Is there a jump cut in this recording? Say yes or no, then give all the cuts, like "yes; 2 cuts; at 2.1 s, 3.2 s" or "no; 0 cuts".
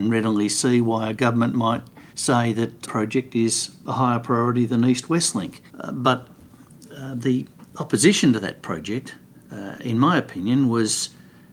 yes; 4 cuts; at 2.1 s, 2.8 s, 5.7 s, 7.7 s